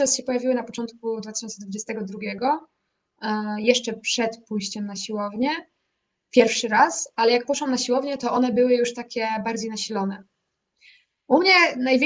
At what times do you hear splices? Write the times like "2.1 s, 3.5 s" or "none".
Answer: none

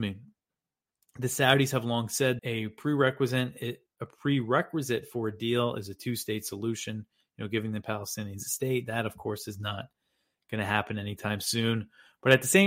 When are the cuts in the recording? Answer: 2.4 s

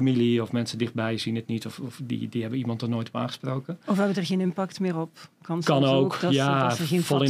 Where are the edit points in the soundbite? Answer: 5.3 s

